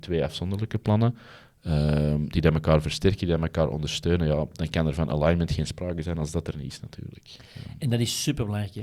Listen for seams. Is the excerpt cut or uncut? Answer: uncut